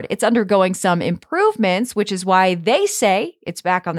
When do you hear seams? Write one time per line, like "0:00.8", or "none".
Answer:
none